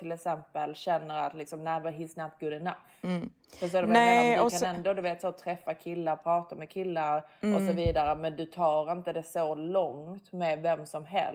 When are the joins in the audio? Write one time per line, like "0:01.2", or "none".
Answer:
none